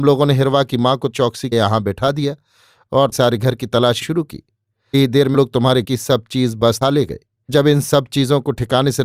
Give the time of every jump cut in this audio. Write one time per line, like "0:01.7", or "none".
0:01.1
0:01.5
0:03.1
0:04.0
0:04.9
0:05.3
0:05.8
0:06.8
0:07.5